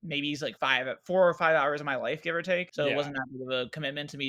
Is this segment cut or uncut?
uncut